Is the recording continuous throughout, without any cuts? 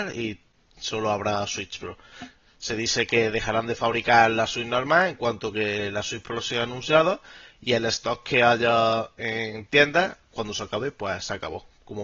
yes; 0 cuts

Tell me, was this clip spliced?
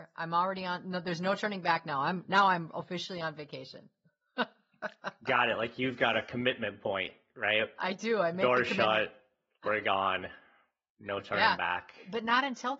no; 0 cuts

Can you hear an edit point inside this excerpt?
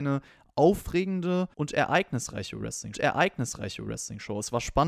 yes; 2 cuts; at 1.5 s, 2.9 s

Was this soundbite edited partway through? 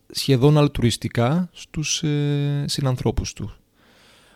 no; 0 cuts

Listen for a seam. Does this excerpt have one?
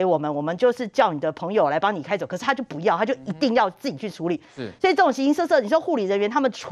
no; 0 cuts

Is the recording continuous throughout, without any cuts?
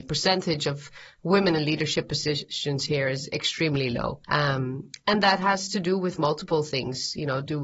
no; 1 cut; at 4.2 s

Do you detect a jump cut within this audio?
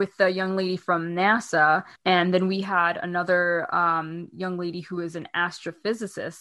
yes; 1 cut; at 2.0 s

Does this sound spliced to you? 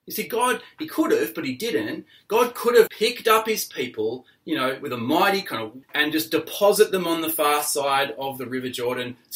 yes; 2 cuts; at 2.9 s, 5.8 s

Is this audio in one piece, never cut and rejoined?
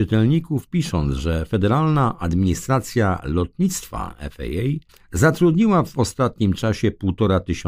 no; 1 cut; at 4.9 s

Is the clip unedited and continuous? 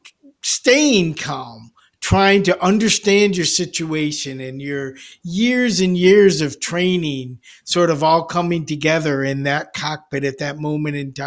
yes; 0 cuts

